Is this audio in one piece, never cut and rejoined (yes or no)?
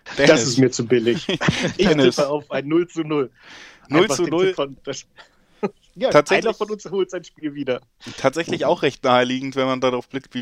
yes